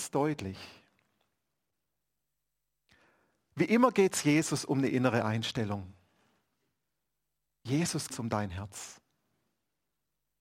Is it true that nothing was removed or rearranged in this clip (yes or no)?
no